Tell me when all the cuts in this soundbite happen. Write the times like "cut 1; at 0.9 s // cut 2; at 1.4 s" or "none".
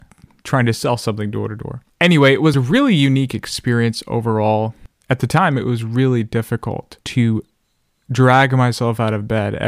cut 1; at 1.9 s // cut 2; at 7.0 s